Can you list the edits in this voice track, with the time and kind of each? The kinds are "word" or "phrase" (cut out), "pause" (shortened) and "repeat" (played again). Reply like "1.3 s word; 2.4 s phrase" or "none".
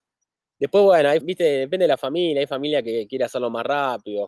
1.2 s word